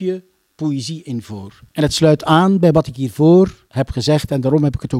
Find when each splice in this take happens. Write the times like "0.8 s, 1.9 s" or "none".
1.7 s, 3.7 s